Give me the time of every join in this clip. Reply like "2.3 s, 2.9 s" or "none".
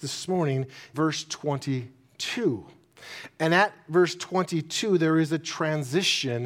0.9 s